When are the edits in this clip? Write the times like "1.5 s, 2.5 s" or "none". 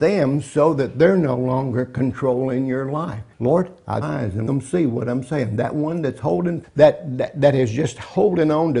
3.3 s, 4.0 s, 4.5 s, 6.6 s